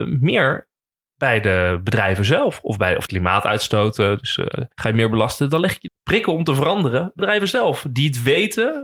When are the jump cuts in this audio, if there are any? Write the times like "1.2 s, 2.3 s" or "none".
3.1 s, 4.7 s, 5.9 s, 7.2 s